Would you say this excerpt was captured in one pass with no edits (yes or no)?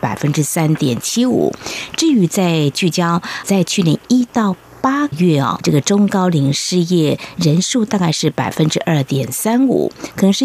no